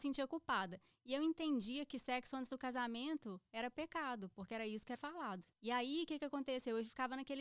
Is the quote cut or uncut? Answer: cut